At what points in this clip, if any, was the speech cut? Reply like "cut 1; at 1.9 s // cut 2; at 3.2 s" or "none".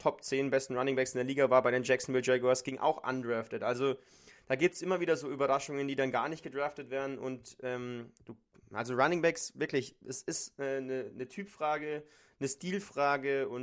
none